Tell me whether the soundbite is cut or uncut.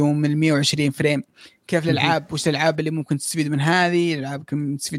uncut